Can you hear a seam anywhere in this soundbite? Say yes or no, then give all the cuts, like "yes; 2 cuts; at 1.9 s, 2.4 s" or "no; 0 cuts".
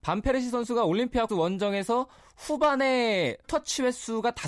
yes; 2 cuts; at 1.3 s, 3.4 s